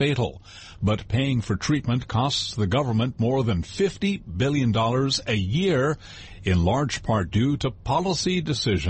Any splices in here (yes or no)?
no